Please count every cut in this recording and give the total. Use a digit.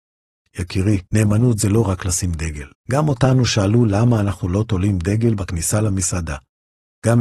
2